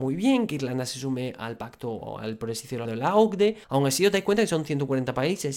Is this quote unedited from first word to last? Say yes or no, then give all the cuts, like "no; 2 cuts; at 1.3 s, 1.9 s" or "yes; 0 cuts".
no; 2 cuts; at 2.8 s, 3.6 s